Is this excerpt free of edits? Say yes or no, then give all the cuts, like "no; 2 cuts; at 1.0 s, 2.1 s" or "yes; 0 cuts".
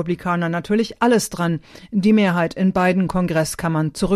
yes; 0 cuts